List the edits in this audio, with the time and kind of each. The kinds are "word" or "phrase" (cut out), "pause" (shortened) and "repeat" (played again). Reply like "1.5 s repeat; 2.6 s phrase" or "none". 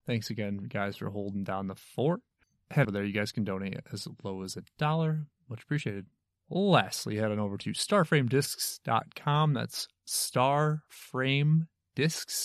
2.8 s phrase